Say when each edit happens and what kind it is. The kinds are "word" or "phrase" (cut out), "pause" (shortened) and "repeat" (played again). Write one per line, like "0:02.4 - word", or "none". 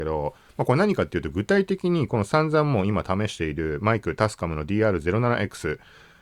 none